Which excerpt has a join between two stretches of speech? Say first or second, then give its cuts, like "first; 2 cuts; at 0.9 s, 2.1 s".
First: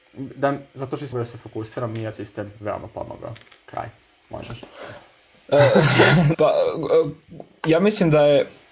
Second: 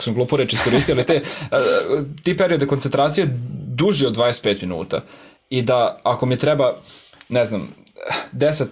first; 3 cuts; at 1.1 s, 2.1 s, 6.3 s